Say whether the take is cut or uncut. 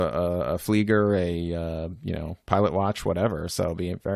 uncut